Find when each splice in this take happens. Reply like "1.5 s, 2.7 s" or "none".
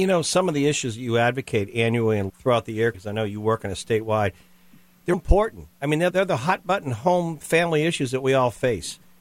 2.3 s, 2.9 s, 5.1 s, 6.1 s